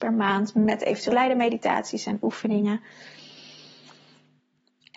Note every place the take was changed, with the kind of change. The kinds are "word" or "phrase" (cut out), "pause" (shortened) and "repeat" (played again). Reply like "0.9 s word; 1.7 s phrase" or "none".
1.1 s word

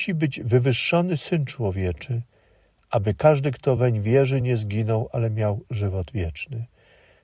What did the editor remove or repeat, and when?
none

